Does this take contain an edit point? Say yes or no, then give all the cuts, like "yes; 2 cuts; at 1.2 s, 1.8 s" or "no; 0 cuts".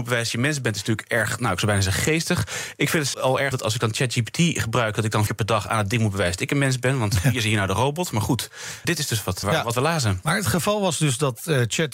yes; 5 cuts; at 3.1 s, 3.5 s, 5.3 s, 8.8 s, 9.4 s